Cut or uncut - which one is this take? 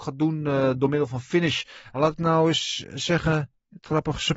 uncut